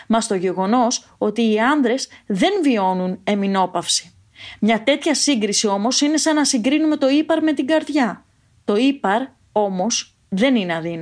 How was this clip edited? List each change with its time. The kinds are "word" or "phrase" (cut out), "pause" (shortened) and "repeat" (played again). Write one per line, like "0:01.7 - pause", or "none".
none

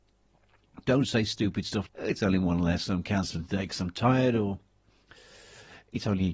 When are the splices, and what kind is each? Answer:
0:01.9 - word

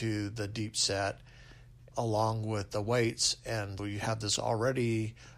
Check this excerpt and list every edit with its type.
0:01.9 - word
0:03.8 - word
0:04.4 - word

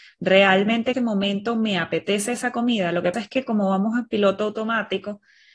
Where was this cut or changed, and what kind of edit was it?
0:00.9 - word
0:03.1 - word

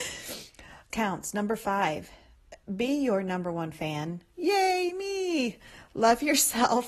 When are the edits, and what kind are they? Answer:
0:00.9 - word
0:02.6 - pause

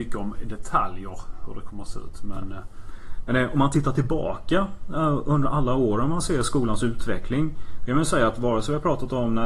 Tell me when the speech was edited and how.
none

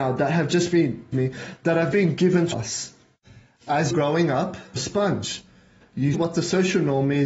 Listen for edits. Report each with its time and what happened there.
0:01.1 - word
0:01.9 - word
0:02.5 - word
0:03.9 - word
0:04.8 - word
0:06.1 - word

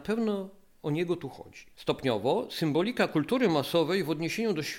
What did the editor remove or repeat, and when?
none

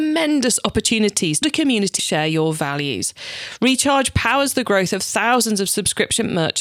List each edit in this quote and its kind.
0:01.4 - word
0:02.0 - phrase

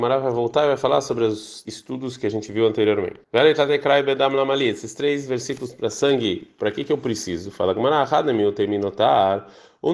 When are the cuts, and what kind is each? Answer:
0:01.6 - word
0:03.2 - pause

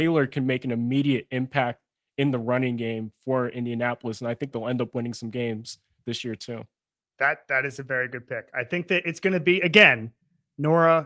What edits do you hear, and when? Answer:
0:04.5 - word

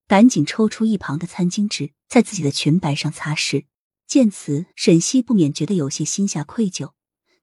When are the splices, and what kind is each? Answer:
0:02.0 - pause
0:03.9 - pause
0:04.7 - pause

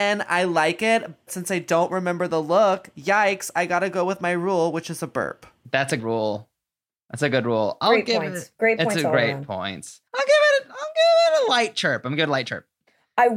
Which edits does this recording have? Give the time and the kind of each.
0:01.3 - word
0:06.0 - word
0:10.1 - pause

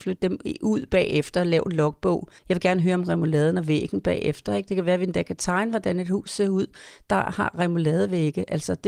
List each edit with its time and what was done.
0:02.4 - pause

